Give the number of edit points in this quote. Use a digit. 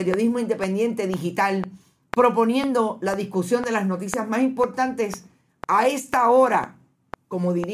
0